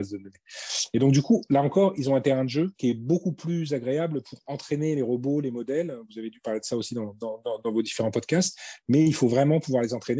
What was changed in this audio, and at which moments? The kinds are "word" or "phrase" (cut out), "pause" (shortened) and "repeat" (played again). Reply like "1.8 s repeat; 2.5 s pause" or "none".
2.7 s pause

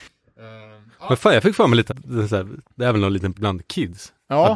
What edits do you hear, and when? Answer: 1.9 s word; 2.7 s pause; 3.3 s word

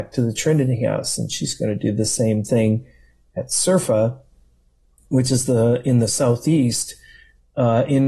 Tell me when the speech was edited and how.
none

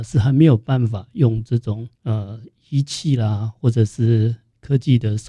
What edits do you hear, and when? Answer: 2.0 s pause

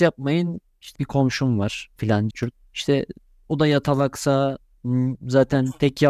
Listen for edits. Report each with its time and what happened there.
1.0 s word; 2.0 s word; 2.3 s word

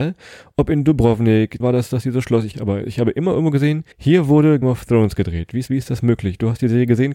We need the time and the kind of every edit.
1.6 s word; 2.5 s phrase; 3.9 s pause; 4.6 s word; 5.7 s word

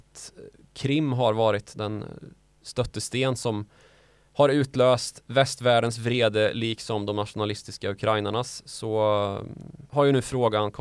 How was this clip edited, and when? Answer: none

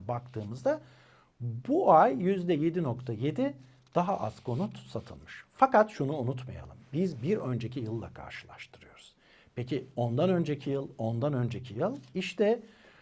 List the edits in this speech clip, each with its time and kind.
none

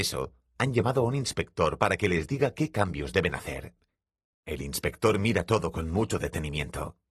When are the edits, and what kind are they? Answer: none

